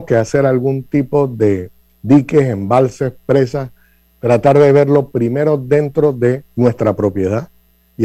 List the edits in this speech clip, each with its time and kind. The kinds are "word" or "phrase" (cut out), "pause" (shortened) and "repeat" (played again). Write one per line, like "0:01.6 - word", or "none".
none